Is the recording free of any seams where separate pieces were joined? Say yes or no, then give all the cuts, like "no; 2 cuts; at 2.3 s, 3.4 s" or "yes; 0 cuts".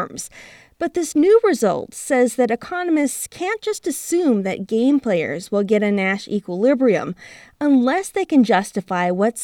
yes; 0 cuts